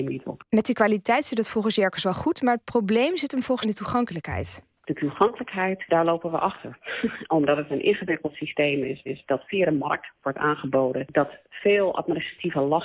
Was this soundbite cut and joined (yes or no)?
yes